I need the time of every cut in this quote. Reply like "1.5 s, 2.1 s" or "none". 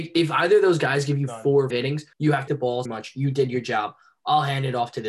1.7 s, 2.1 s, 2.5 s, 2.8 s